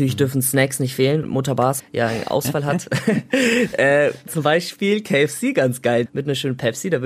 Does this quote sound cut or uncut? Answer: cut